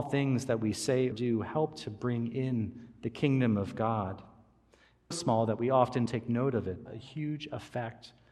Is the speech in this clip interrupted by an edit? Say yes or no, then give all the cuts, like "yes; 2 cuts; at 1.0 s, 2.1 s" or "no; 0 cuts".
yes; 4 cuts; at 1.1 s, 5.1 s, 6.1 s, 6.9 s